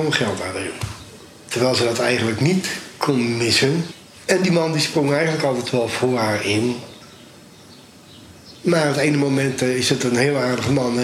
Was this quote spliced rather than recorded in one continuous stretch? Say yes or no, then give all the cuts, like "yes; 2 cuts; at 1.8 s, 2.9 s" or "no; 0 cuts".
no; 0 cuts